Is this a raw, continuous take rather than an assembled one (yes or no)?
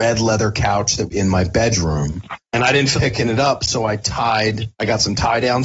no